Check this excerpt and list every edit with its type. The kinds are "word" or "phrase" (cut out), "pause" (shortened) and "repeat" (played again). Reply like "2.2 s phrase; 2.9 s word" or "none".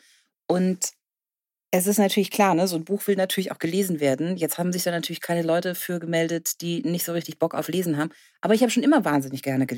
none